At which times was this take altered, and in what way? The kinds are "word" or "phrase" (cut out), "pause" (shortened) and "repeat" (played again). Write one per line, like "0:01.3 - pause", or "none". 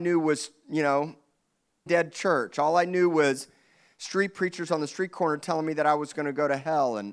0:01.9 - word

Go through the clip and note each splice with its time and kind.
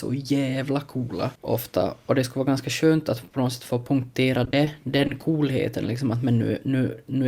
0:01.3 - pause

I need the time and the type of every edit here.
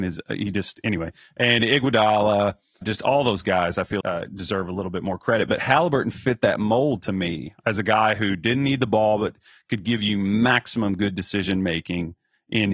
0:02.8 - word
0:04.0 - word

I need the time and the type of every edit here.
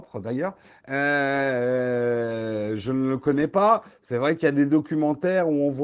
none

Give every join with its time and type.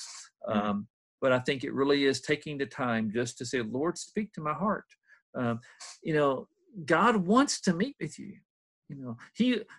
none

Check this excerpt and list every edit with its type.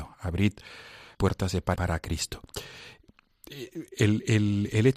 0:01.1 - word
0:01.7 - word

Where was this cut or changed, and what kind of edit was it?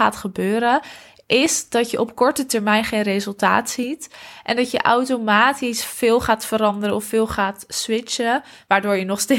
none

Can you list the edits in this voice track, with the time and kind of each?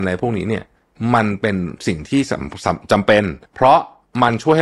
0:03.5 - pause

